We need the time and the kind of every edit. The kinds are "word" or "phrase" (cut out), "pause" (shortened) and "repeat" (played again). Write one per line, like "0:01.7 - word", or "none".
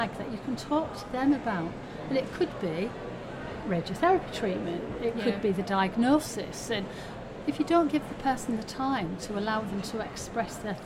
none

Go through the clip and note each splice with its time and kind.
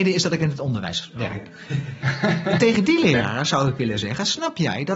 none

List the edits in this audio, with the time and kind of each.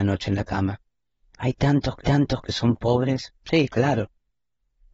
0:02.0 - repeat
0:03.4 - pause

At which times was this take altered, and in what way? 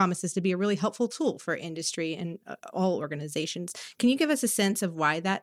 none

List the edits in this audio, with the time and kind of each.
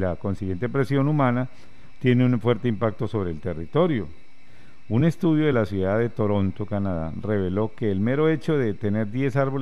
none

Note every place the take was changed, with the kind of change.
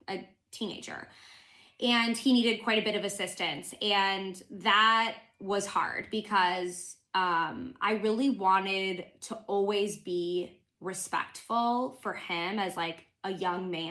none

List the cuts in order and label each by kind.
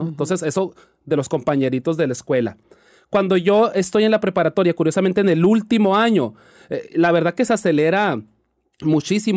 none

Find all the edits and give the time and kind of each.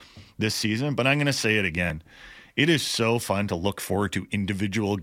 none

